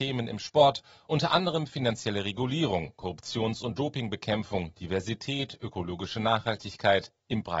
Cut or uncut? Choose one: uncut